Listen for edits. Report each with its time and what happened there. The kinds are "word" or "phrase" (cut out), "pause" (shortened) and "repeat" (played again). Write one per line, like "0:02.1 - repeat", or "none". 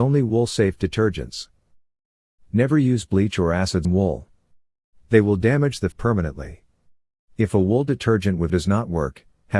0:03.8 - word
0:05.9 - word
0:08.5 - word